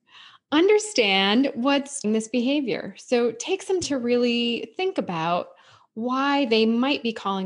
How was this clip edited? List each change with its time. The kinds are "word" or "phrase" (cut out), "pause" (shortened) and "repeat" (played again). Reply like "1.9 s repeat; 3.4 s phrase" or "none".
2.0 s word; 3.8 s word